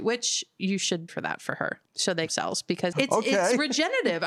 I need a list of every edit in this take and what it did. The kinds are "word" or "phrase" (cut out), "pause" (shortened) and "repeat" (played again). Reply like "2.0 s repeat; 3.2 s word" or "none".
1.1 s word; 1.9 s pause; 2.3 s phrase; 2.9 s word